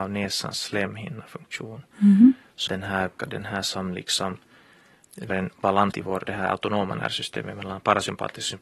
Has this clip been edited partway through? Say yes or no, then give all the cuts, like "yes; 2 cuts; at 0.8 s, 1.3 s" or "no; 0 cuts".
yes; 5 cuts; at 2.7 s, 3.2 s, 5.3 s, 5.9 s, 6.2 s